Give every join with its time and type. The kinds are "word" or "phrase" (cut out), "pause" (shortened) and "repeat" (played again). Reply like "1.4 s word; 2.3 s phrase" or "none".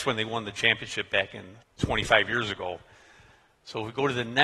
1.6 s word